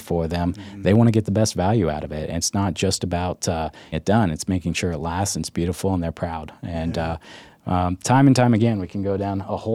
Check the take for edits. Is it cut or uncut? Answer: cut